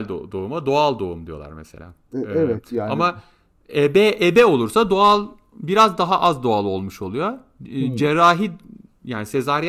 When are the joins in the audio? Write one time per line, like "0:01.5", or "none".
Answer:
none